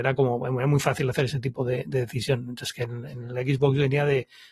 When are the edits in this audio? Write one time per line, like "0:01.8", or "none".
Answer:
none